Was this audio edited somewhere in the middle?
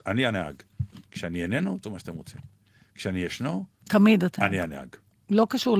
yes; 3 cuts; at 1.1 s, 1.8 s, 4.4 s

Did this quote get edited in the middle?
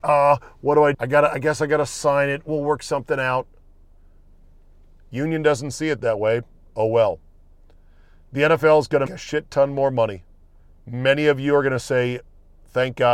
yes; 2 cuts; at 0.9 s, 9.1 s

